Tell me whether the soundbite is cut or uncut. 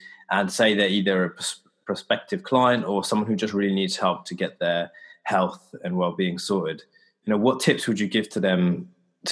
uncut